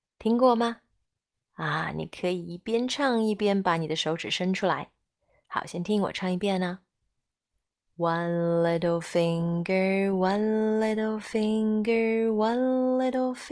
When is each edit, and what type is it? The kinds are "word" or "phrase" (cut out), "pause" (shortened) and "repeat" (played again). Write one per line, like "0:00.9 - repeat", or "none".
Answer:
none